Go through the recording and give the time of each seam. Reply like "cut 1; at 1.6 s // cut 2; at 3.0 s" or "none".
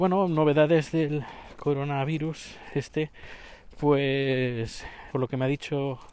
cut 1; at 5.1 s